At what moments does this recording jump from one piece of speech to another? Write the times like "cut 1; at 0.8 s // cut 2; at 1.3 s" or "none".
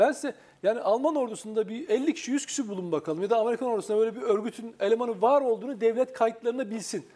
none